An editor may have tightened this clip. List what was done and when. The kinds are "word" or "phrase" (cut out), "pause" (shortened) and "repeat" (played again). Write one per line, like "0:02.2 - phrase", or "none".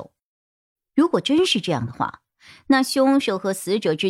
none

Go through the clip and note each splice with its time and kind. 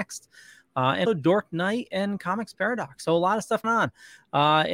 0:01.0 - word
0:03.6 - word

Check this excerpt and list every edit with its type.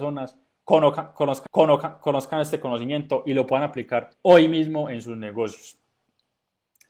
0:01.5 - repeat
0:04.1 - pause

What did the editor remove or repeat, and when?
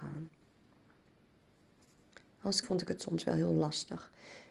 0:02.6 - word

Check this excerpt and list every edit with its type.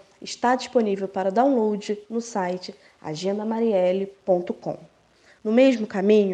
none

